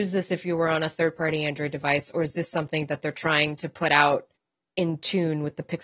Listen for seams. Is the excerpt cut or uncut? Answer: cut